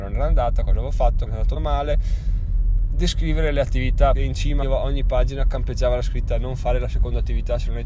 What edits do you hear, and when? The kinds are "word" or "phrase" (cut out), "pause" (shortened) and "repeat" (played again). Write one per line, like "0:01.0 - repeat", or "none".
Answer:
0:01.3 - word
0:01.6 - phrase
0:04.1 - phrase
0:04.6 - word